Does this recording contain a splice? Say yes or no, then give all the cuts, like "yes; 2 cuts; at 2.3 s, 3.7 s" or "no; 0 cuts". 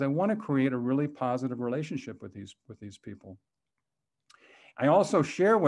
no; 0 cuts